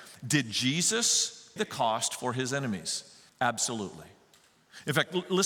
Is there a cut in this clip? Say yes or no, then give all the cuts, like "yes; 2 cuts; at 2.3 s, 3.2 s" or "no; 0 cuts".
yes; 2 cuts; at 1.6 s, 3.3 s